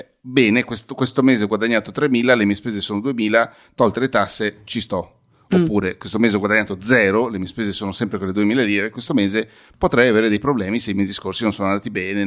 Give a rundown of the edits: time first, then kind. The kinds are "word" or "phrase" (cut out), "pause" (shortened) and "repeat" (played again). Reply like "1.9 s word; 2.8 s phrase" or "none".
none